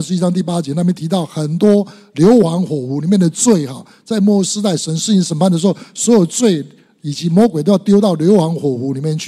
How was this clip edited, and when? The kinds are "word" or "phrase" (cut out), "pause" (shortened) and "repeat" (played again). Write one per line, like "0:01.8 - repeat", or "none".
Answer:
none